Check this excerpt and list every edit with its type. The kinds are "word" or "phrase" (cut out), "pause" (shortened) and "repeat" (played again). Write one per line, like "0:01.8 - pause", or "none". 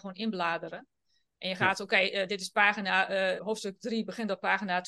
0:03.4 - word